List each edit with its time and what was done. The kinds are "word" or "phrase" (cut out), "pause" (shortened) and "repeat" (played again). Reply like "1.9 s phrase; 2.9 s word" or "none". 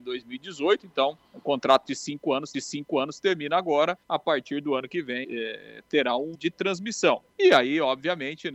1.3 s pause; 2.5 s repeat; 4.0 s pause; 5.2 s phrase; 6.3 s phrase; 7.3 s pause